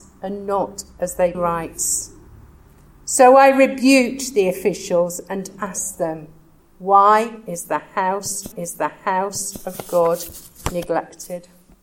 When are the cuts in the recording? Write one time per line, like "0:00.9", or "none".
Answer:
0:01.3
0:06.6
0:08.5